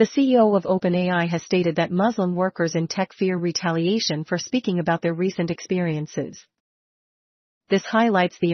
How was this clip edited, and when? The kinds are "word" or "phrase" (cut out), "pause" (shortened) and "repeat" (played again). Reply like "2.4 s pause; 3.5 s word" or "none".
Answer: none